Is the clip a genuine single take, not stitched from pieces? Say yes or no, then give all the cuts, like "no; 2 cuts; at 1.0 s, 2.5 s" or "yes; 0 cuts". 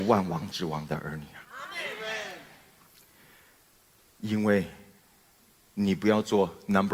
yes; 0 cuts